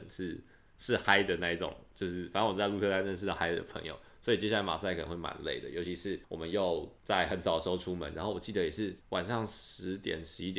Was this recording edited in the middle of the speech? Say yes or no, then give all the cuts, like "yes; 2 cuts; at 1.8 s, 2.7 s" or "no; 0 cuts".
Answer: yes; 3 cuts; at 6.2 s, 7.0 s, 9.0 s